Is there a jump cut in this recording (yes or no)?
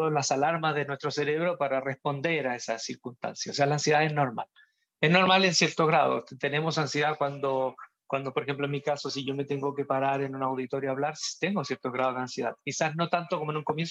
no